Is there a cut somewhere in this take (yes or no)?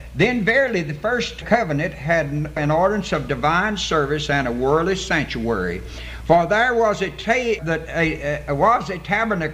yes